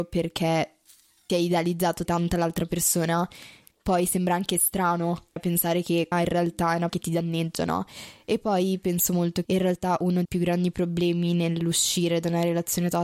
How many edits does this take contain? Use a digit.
8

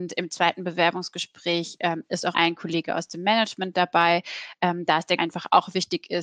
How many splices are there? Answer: 2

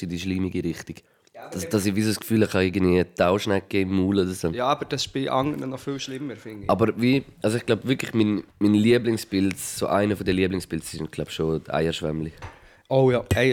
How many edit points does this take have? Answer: 2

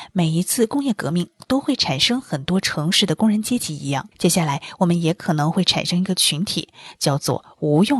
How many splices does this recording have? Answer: 1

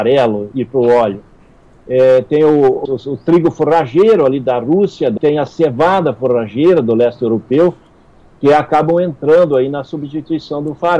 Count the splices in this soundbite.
2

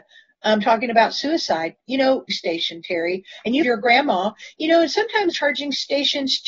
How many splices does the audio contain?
3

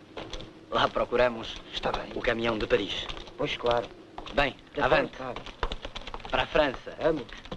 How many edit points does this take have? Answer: 0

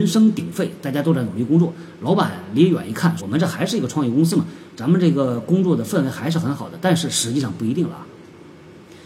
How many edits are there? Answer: 1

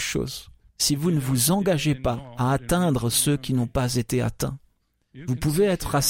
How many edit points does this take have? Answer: 0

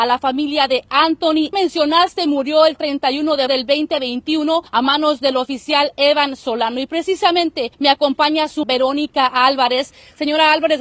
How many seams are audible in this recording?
5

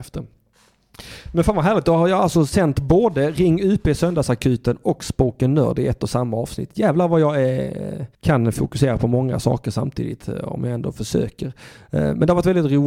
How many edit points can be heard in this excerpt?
1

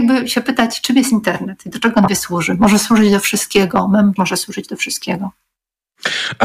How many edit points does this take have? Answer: 2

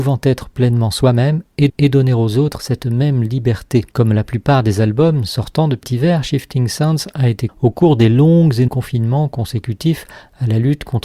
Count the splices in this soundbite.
5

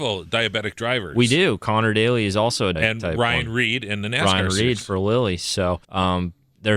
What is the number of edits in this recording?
2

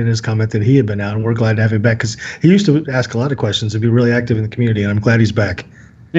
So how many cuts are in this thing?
0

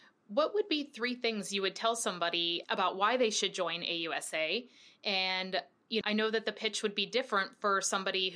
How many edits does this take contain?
2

